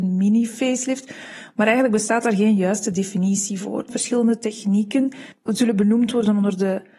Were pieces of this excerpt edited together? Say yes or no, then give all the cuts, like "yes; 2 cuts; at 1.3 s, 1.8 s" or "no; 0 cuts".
no; 0 cuts